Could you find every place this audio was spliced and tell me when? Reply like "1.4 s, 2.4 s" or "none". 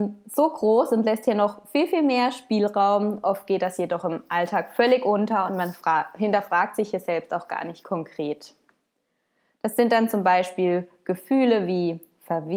none